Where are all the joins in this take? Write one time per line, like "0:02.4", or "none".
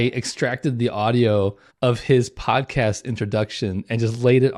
0:01.7